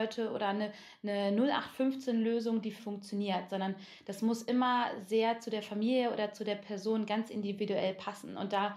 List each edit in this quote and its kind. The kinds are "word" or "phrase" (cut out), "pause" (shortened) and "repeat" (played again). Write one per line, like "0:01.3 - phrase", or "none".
0:02.8 - word